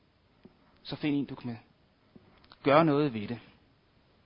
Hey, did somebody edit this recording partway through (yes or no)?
yes